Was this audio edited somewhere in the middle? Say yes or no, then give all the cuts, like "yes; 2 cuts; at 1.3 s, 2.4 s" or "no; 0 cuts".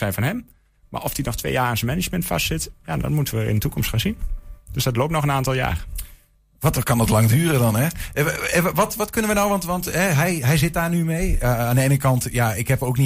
no; 0 cuts